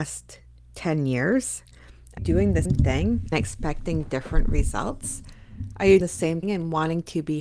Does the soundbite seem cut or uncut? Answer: cut